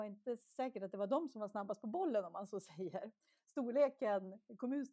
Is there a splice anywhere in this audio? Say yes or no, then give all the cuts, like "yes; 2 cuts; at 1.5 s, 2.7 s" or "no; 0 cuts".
no; 0 cuts